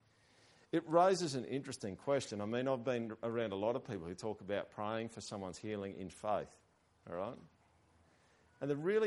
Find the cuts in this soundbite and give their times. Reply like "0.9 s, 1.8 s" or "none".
none